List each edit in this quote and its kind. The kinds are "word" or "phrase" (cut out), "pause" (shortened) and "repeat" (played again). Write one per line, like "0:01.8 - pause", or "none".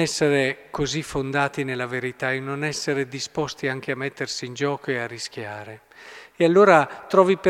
none